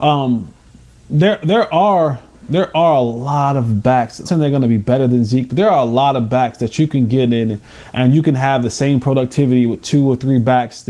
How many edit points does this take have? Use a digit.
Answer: 1